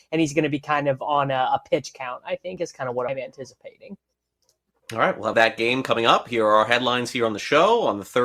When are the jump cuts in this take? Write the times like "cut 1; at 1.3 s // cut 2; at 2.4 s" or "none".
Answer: cut 1; at 3.1 s // cut 2; at 5.3 s